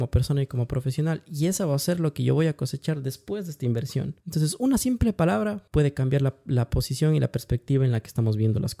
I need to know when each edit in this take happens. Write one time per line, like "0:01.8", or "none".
0:04.2
0:05.7

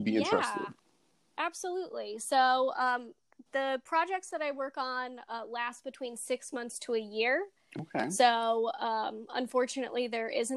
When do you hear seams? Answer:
none

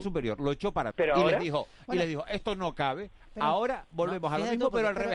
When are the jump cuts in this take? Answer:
0:00.9

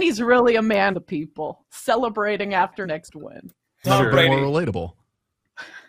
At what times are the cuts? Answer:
0:00.9
0:02.8
0:03.8

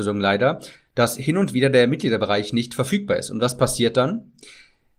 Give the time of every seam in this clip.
none

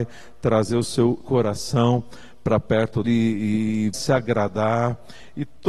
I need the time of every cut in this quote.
0:01.2
0:03.0
0:03.9

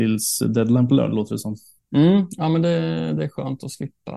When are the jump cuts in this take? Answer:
0:01.8

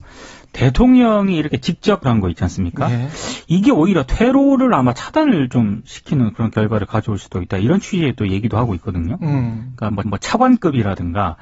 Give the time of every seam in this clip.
0:02.0
0:10.0

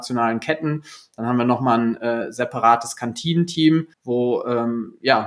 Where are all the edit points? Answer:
0:03.9

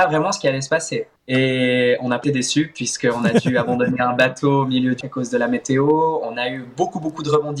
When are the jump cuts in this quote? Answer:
0:01.2
0:02.2
0:05.0

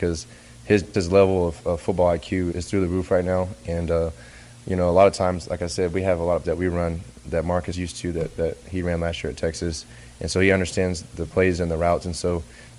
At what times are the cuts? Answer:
0:00.9
0:02.5
0:06.4
0:07.7

